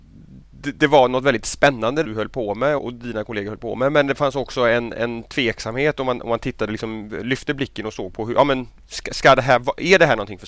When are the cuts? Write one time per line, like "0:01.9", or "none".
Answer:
0:02.0
0:02.8